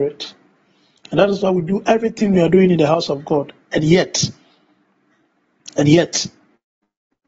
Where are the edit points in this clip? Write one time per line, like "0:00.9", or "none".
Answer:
none